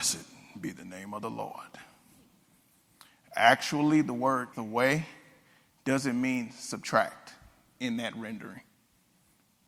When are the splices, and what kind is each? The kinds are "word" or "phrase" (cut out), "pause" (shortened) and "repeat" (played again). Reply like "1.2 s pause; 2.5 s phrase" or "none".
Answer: 4.5 s word